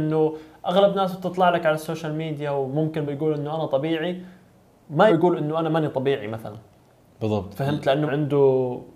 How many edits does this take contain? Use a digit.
3